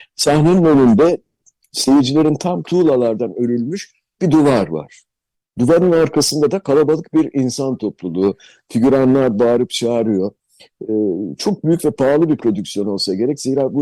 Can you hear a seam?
yes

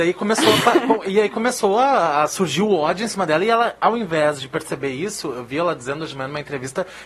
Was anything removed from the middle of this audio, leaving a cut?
no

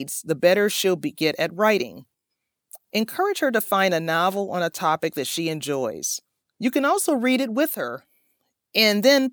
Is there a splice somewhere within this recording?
yes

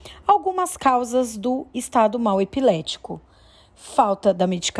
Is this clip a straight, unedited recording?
yes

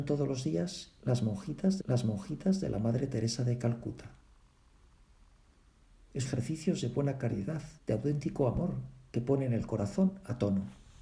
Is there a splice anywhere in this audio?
yes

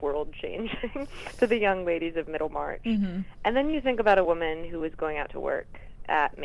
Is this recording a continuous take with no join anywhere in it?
yes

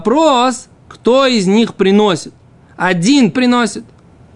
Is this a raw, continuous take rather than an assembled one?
no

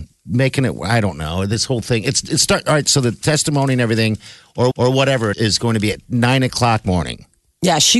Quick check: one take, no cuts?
no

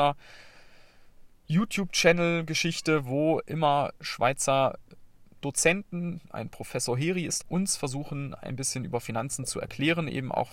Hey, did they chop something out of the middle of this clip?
yes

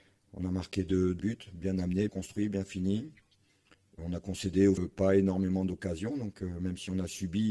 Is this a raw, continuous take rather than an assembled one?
no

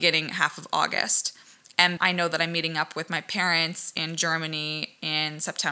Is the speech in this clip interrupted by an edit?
yes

